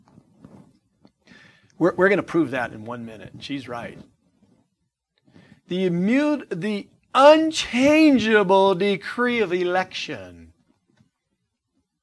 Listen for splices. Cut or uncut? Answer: uncut